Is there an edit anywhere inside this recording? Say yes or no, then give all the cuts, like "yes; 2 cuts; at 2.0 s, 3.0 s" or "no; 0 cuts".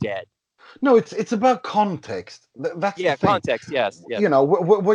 no; 0 cuts